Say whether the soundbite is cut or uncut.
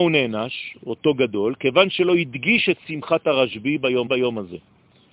cut